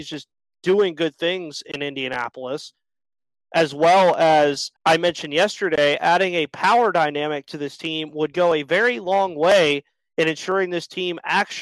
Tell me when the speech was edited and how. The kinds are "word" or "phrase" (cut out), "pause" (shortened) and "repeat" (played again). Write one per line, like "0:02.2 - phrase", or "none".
0:04.8 - pause